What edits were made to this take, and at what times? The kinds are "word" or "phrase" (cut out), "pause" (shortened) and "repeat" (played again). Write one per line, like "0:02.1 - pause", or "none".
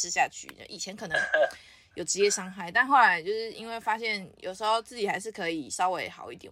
none